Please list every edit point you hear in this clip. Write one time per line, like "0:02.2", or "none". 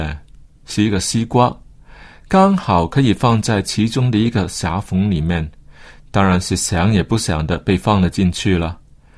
none